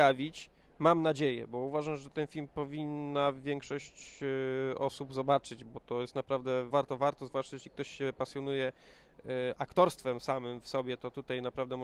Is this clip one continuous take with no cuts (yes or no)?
no